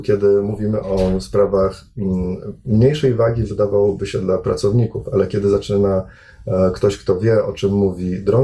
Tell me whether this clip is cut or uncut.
uncut